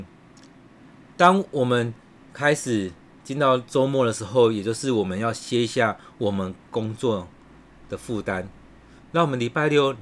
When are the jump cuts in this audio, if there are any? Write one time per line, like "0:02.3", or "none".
none